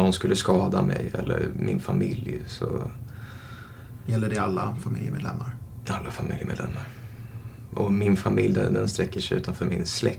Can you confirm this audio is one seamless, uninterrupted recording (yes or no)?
yes